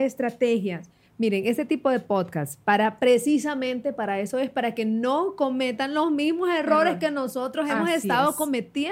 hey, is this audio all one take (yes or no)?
yes